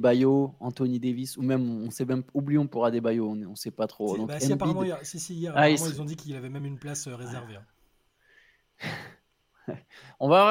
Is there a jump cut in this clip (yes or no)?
no